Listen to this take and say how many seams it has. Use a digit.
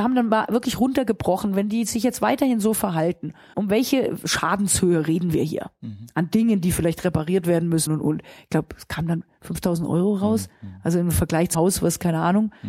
3